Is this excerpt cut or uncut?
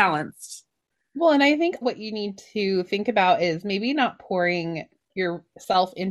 cut